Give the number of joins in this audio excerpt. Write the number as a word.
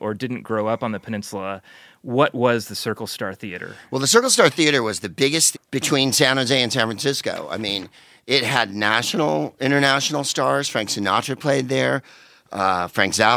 one